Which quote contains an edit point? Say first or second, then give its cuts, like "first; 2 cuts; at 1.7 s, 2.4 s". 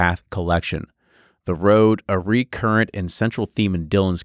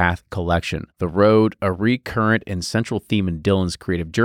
second; 1 cut; at 0.9 s